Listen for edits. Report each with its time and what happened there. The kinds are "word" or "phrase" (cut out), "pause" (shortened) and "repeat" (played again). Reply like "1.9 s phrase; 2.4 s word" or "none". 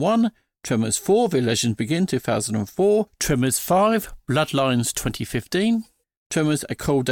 none